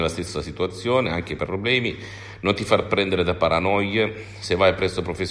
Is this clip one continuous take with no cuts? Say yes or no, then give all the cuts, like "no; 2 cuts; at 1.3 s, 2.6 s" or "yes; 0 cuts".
no; 1 cut; at 1.4 s